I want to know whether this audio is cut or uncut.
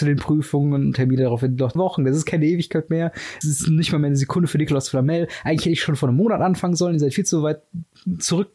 cut